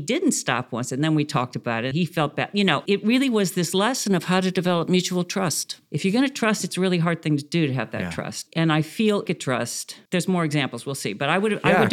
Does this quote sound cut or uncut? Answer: cut